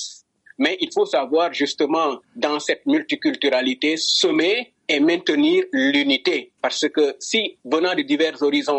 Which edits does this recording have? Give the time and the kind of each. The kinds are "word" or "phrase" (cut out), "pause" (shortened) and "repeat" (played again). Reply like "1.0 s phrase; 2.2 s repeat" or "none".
6.6 s pause; 7.6 s pause